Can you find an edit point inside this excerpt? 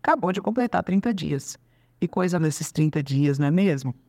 yes; 2 cuts; at 2.1 s, 2.4 s

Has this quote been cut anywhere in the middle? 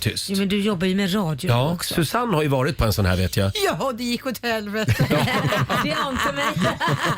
no; 0 cuts

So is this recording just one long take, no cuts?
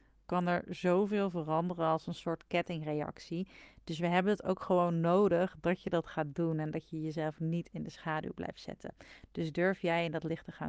yes; 0 cuts

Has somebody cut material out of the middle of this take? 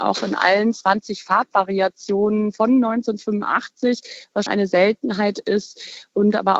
yes; 1 cut; at 4.5 s

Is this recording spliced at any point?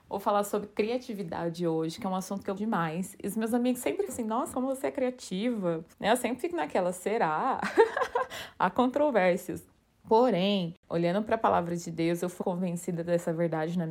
yes; 6 cuts; at 2.6 s, 4.1 s, 4.5 s, 5.9 s, 10.8 s, 12.4 s

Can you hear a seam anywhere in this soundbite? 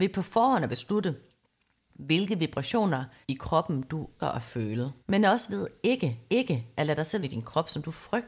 yes; 5 cuts; at 3.2 s, 4.2 s, 5.0 s, 6.3 s, 7.2 s

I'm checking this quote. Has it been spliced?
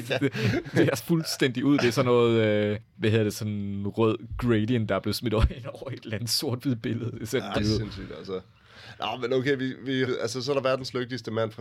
yes; 3 cuts; at 1.0 s, 7.6 s, 10.1 s

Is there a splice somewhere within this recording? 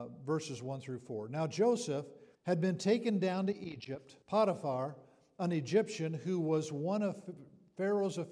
yes; 2 cuts; at 2.3 s, 4.2 s

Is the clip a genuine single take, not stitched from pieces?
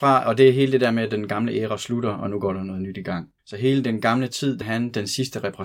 no; 2 cuts; at 3.4 s, 4.6 s

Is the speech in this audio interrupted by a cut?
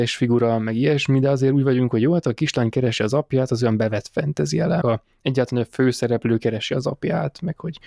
yes; 1 cut; at 4.8 s

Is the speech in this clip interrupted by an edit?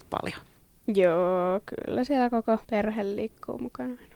yes; 1 cut; at 2.6 s

